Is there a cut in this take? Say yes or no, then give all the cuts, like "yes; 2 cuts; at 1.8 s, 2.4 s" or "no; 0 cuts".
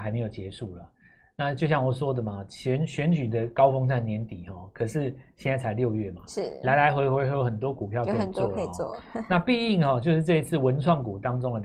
no; 0 cuts